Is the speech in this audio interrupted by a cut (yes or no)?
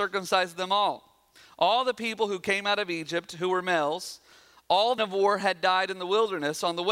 yes